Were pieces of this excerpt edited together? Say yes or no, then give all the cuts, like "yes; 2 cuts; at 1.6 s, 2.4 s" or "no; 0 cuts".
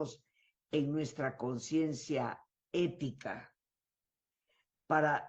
no; 0 cuts